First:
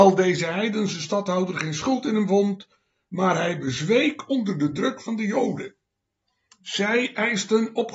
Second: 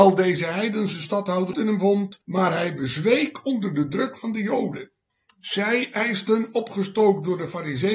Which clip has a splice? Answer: second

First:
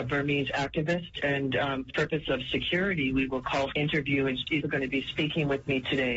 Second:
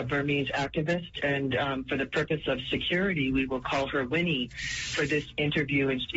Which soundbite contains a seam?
first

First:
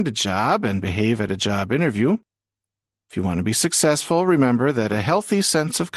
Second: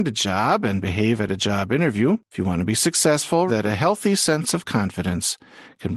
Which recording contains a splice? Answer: second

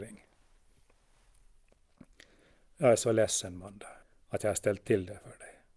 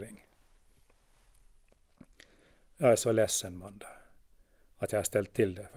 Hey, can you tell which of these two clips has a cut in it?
first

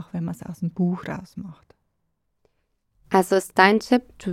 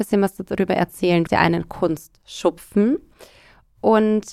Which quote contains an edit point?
second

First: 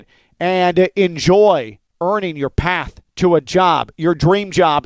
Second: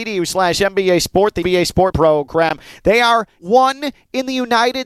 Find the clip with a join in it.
second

